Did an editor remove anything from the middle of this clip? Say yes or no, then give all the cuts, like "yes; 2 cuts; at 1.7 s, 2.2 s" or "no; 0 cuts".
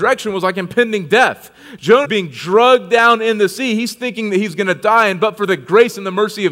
yes; 1 cut; at 2.0 s